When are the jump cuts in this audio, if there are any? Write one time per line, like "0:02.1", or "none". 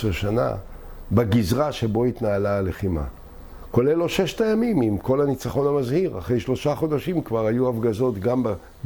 none